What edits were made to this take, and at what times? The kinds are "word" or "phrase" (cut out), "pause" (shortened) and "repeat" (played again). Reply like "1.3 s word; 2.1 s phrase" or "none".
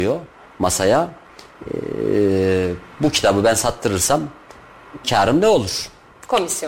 5.0 s word

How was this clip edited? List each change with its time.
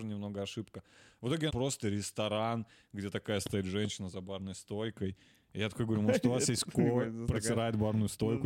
1.5 s word

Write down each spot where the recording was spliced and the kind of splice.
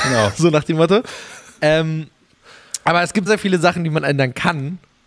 3.3 s word

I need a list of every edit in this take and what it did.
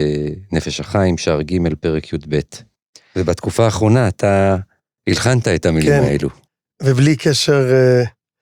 none

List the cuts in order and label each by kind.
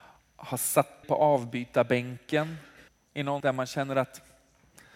1.0 s word; 2.9 s pause; 3.4 s word

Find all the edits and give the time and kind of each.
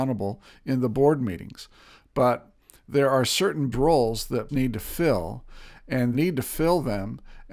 3.7 s word; 4.5 s word; 6.1 s word

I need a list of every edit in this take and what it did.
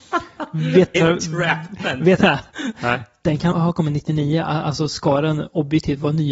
0.9 s word; 2.2 s word; 3.5 s word

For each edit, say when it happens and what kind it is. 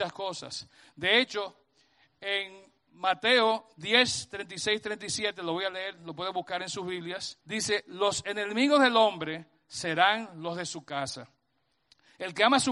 3.7 s pause; 7.4 s pause

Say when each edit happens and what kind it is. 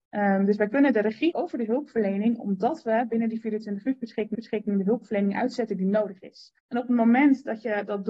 1.3 s word; 4.3 s repeat; 6.6 s pause

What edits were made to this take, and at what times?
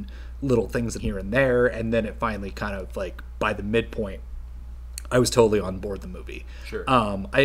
1.0 s phrase

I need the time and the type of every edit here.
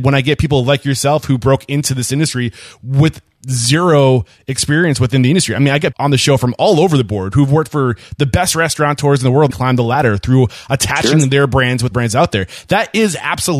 5.9 s word; 9.5 s phrase; 11.9 s phrase

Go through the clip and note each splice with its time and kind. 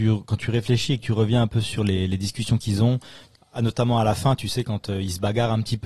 none

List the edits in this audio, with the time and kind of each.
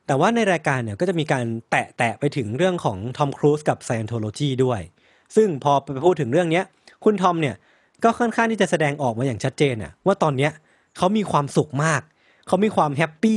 none

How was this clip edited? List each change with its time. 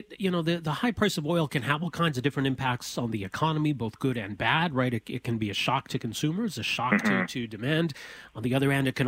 none

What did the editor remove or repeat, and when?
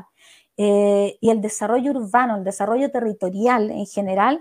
none

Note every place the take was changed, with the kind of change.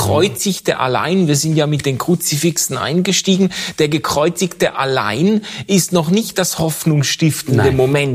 none

